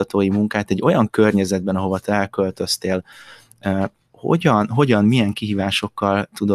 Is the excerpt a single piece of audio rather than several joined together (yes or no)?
yes